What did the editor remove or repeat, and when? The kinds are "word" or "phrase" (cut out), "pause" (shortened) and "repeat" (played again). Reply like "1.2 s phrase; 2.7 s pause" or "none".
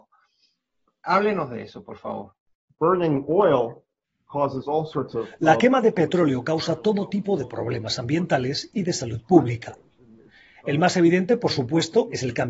none